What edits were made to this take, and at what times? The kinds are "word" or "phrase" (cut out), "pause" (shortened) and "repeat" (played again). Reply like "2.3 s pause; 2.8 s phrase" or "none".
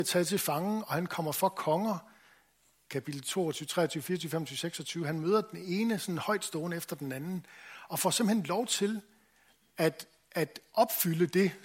none